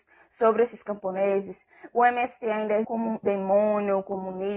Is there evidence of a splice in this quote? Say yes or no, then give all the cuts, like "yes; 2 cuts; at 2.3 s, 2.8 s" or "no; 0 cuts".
yes; 2 cuts; at 2.8 s, 3.2 s